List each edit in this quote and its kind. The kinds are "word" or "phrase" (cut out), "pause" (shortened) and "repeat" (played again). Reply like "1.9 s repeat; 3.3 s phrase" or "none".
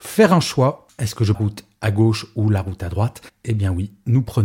1.3 s phrase; 3.3 s pause